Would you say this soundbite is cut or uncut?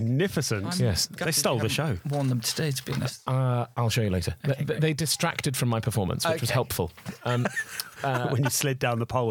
uncut